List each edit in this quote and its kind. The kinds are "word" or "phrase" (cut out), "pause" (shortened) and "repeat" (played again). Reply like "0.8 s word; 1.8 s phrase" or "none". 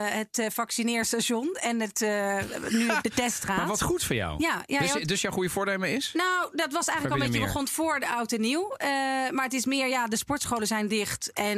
3.0 s word